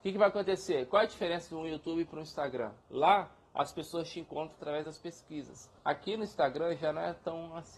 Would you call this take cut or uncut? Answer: cut